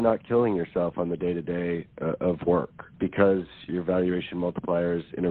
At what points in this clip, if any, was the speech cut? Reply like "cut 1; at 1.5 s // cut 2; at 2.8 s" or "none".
cut 1; at 2.9 s // cut 2; at 3.7 s